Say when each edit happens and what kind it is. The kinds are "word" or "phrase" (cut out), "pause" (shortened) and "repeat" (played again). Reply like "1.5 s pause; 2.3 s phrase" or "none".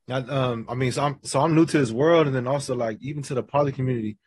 none

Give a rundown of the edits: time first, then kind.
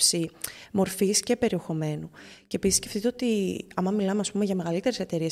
none

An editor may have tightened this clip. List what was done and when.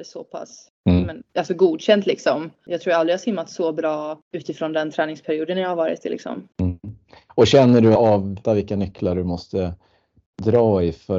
1.3 s pause; 6.5 s pause; 8.0 s phrase; 8.4 s phrase

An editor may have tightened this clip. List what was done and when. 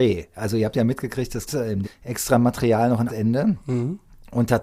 1.5 s word; 1.8 s word; 3.1 s word

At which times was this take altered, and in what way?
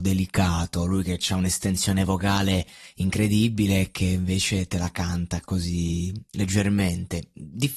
none

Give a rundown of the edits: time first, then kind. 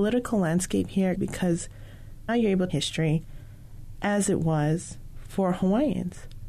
1.2 s phrase; 2.3 s word; 2.7 s phrase

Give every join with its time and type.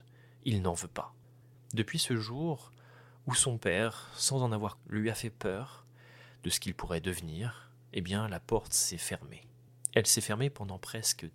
4.8 s word

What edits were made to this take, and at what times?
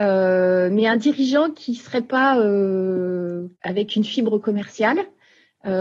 3.5 s pause

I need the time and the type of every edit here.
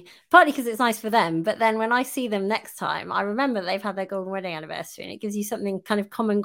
none

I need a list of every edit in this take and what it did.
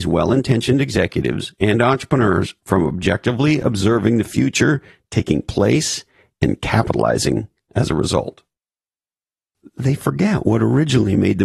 none

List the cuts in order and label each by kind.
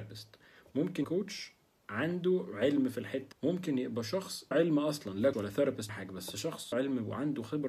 1.0 s word; 3.3 s word; 4.5 s word; 5.3 s word; 5.9 s word; 6.7 s word

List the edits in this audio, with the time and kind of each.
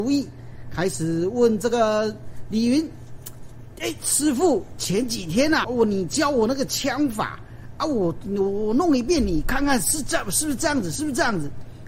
5.6 s word

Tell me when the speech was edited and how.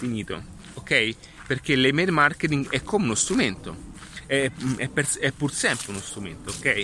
none

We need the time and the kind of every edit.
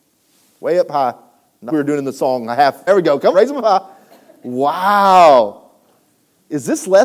1.7 s word; 2.9 s word; 3.3 s word

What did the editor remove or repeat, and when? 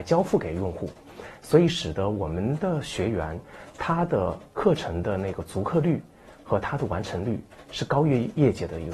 none

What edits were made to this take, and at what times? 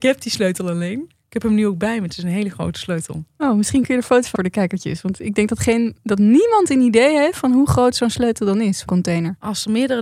4.4 s word; 8.9 s word

